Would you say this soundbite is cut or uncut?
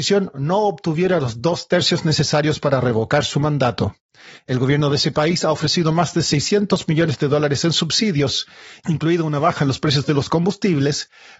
uncut